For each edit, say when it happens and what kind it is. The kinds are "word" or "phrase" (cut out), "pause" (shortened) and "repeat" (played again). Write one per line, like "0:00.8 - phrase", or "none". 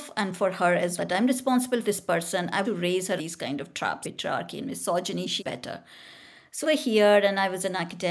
0:01.0 - word
0:01.8 - word
0:02.6 - word
0:03.2 - word
0:04.0 - word
0:05.4 - word
0:06.6 - word